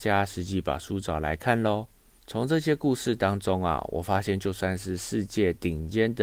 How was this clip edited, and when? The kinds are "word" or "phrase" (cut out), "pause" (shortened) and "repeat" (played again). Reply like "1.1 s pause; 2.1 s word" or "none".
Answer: 2.2 s pause